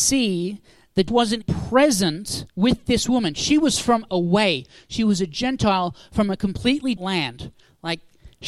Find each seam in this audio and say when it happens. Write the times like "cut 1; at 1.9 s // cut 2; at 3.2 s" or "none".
cut 1; at 1.1 s // cut 2; at 1.4 s // cut 3; at 2.5 s // cut 4; at 4.1 s // cut 5; at 7.0 s